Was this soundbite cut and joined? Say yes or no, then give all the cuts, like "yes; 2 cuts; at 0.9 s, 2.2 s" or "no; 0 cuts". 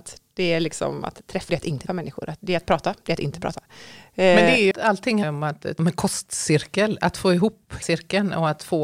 yes; 6 cuts; at 1.5 s, 1.9 s, 4.7 s, 5.2 s, 5.8 s, 7.8 s